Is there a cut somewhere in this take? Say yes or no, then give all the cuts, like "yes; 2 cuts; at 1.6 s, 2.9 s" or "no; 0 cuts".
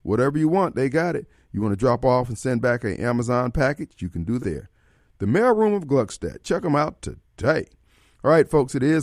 yes; 1 cut; at 4.4 s